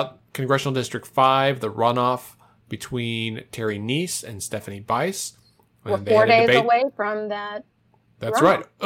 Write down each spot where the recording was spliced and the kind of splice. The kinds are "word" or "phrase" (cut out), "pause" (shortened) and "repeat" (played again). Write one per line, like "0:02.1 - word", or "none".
none

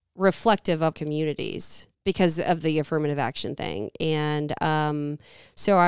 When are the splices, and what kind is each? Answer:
0:00.9 - word
0:01.9 - pause

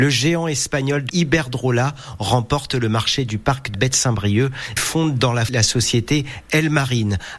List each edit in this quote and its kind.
0:01.1 - word
0:03.7 - word
0:04.8 - word
0:05.5 - word

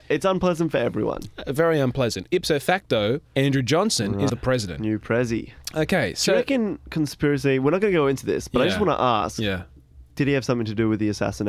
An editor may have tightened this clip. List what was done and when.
0:03.3 - pause
0:04.3 - word
0:10.1 - pause

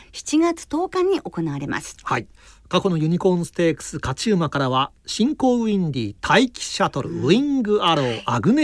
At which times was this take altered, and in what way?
0:02.5 - pause

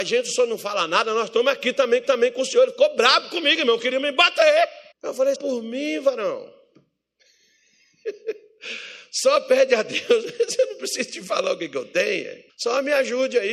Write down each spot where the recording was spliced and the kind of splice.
0:02.0 - repeat
0:04.9 - pause
0:05.3 - phrase
0:12.5 - pause

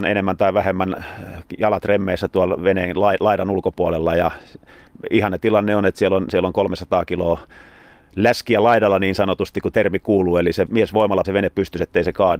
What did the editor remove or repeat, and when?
0:09.7 - word
0:10.7 - word
0:11.2 - word

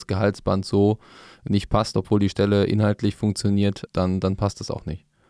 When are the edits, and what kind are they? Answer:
0:03.9 - word

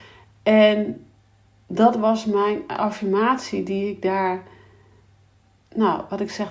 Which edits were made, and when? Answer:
none

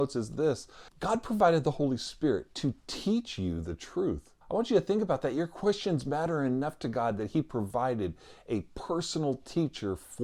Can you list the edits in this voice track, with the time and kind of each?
0:04.4 - pause

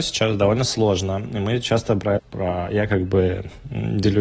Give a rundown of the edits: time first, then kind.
0:02.2 - phrase

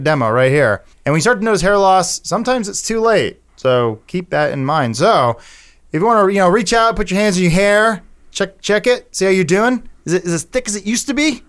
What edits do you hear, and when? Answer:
0:00.9 - pause
0:03.5 - pause

